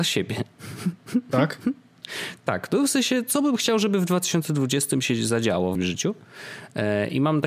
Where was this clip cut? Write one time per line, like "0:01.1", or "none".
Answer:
0:05.8